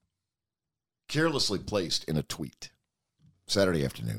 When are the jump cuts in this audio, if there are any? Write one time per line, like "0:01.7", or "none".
none